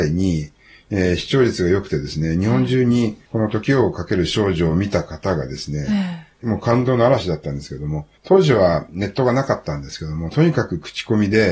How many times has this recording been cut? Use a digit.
2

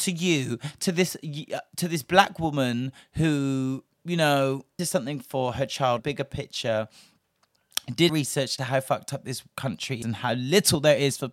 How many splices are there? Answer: 6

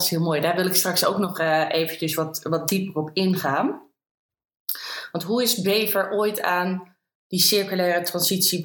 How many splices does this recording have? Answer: 1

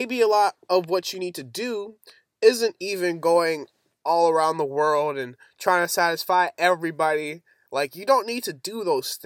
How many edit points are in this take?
0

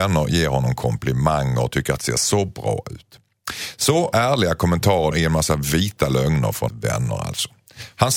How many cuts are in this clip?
4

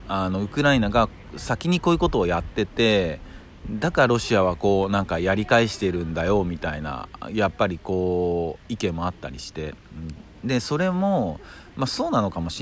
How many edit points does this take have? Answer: 0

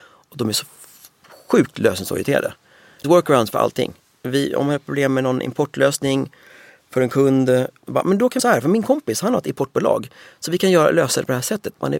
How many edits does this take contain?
2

